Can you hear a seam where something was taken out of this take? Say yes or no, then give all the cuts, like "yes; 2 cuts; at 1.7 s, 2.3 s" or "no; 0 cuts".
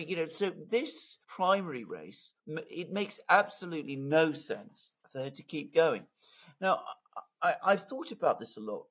yes; 3 cuts; at 1.2 s, 2.4 s, 5.0 s